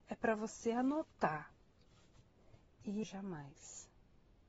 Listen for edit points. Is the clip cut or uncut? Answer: cut